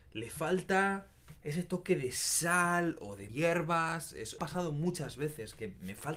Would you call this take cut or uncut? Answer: cut